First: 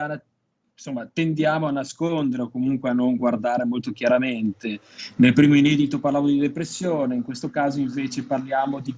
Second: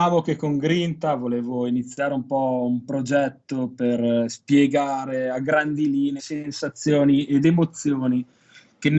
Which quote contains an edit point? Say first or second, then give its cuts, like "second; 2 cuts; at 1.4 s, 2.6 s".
second; 1 cut; at 6.2 s